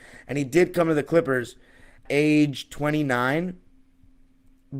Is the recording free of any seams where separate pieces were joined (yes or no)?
no